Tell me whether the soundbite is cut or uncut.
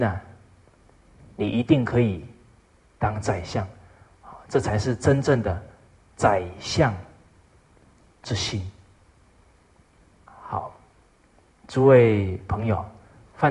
uncut